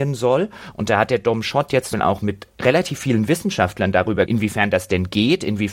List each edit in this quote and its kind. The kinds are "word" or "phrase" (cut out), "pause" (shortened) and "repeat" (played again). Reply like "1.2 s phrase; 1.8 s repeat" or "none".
1.9 s word; 4.3 s word